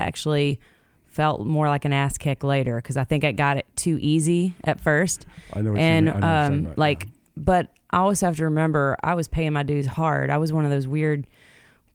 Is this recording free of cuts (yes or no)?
yes